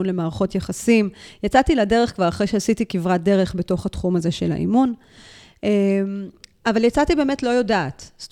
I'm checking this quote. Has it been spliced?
no; 0 cuts

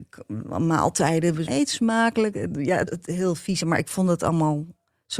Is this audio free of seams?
no; 3 cuts; at 1.5 s, 2.9 s, 3.6 s

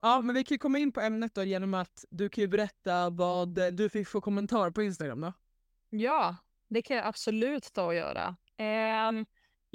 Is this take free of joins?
yes; 0 cuts

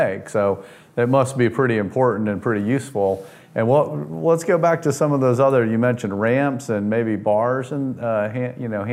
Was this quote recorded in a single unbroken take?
yes; 0 cuts

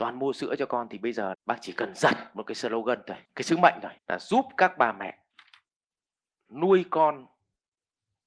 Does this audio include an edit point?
yes; 3 cuts; at 1.3 s, 3.2 s, 4.0 s

